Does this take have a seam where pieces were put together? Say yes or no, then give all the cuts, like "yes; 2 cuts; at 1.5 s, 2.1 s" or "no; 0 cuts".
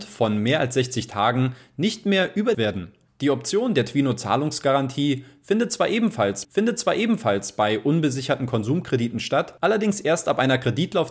yes; 3 cuts; at 2.5 s, 6.4 s, 9.6 s